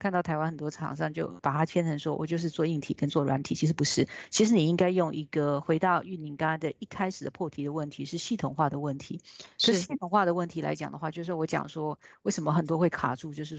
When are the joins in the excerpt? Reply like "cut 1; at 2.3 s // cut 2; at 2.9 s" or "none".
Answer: cut 1; at 1.4 s